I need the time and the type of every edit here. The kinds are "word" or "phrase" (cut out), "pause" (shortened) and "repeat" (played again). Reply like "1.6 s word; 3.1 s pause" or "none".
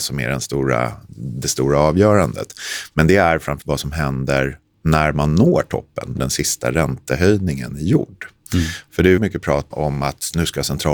3.6 s word; 4.6 s pause; 6.2 s word; 9.2 s word; 9.7 s word

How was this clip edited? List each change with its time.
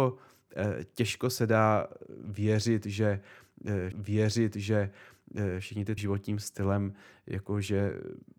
3.9 s repeat; 6.0 s phrase

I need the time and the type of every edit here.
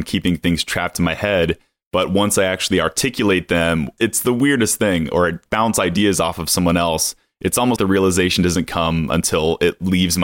7.8 s word

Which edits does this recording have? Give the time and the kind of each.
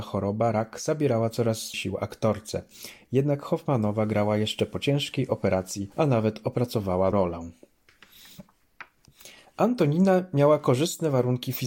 1.7 s word; 5.9 s pause; 7.1 s word

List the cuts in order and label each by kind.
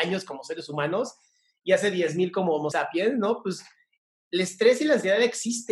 2.7 s word

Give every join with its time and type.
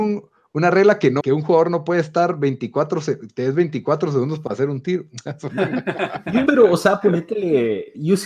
1.2 s phrase; 6.5 s word

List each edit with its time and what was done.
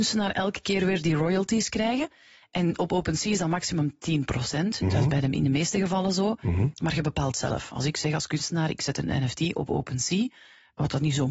none

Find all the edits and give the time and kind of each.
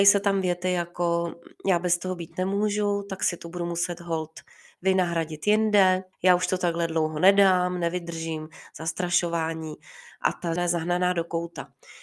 6.1 s pause; 10.6 s word

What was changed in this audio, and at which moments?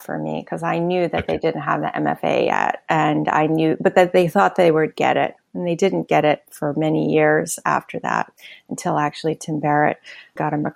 none

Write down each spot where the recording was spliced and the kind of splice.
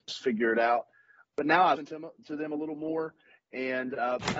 1.8 s word

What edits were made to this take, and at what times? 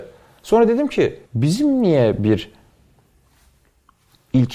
1.3 s pause

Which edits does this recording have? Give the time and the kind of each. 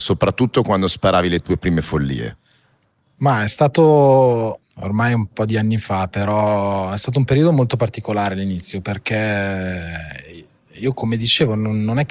none

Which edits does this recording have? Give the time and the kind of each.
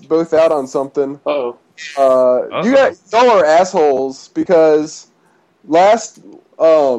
none

